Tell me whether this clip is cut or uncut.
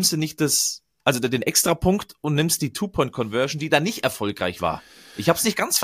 uncut